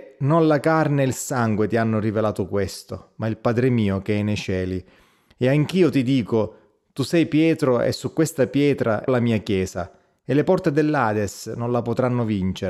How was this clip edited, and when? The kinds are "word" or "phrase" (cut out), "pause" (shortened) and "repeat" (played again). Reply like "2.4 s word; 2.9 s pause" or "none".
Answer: 9.1 s word